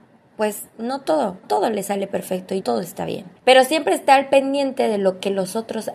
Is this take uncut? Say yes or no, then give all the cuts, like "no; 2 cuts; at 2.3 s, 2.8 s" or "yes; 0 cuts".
no; 3 cuts; at 1.4 s, 2.6 s, 3.4 s